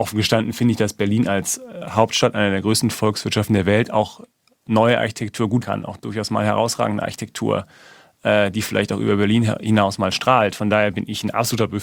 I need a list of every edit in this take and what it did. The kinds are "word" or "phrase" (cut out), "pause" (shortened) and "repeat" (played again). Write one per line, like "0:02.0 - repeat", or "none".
0:05.6 - word